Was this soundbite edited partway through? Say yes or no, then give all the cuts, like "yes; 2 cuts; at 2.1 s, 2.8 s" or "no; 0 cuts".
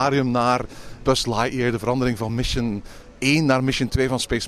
no; 0 cuts